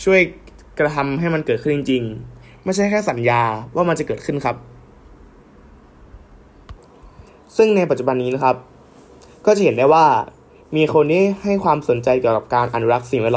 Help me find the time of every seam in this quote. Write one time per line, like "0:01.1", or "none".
none

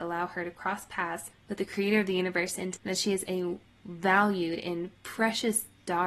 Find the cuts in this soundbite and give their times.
0:02.8

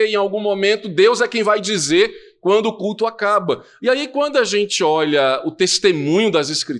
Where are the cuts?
none

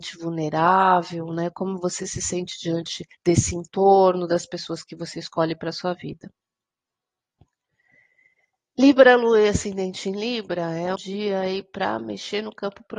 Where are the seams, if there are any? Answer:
0:03.1
0:11.0

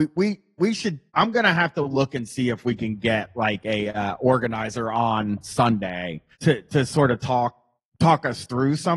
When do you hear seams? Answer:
0:01.1
0:06.3
0:07.8

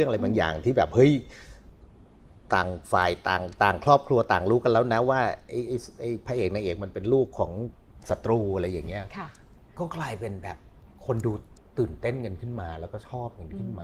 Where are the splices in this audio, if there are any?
0:02.4
0:11.6

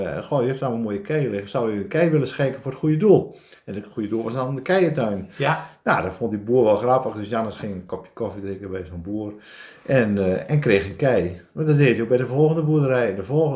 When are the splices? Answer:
none

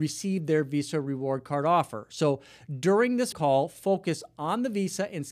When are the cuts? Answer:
0:03.3

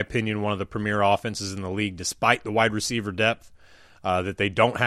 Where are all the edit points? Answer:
none

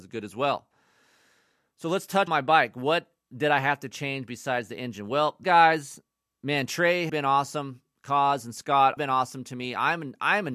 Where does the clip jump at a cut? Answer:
0:02.3
0:05.4
0:07.1
0:09.0

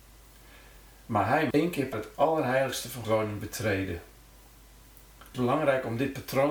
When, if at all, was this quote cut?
0:01.5
0:01.9
0:03.0
0:05.3

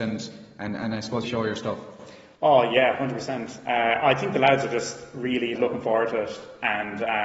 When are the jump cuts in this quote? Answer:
0:01.2
0:05.5

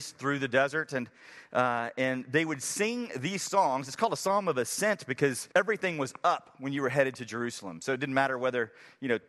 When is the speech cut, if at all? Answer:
0:05.5

